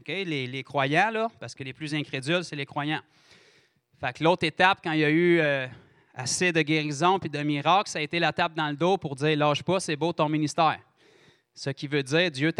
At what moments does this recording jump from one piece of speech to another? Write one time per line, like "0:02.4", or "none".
none

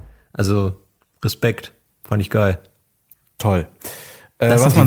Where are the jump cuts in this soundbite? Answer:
none

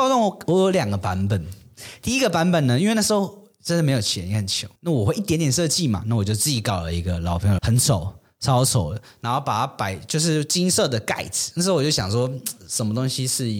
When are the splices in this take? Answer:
0:04.8
0:07.6

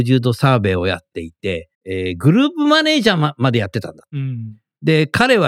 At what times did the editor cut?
0:01.7

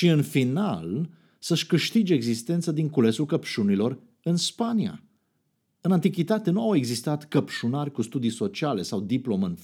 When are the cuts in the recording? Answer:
none

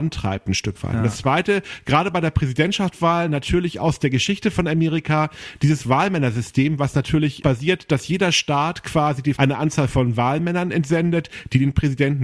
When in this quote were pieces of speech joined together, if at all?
0:07.4
0:09.4

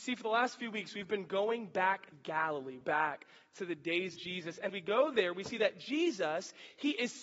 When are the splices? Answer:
0:02.1
0:02.8
0:04.1
0:04.7

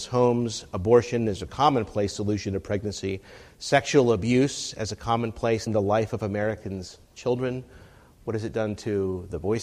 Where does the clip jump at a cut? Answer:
0:05.7

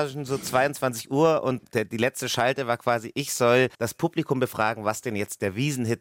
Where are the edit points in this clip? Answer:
0:01.6
0:03.7

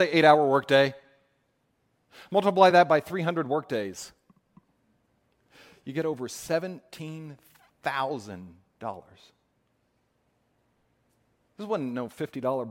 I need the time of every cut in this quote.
none

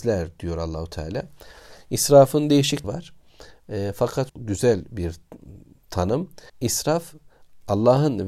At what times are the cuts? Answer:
0:02.8
0:04.3
0:06.5

